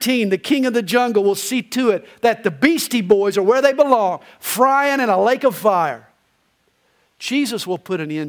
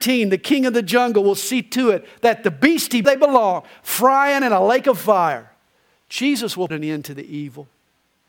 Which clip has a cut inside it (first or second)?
second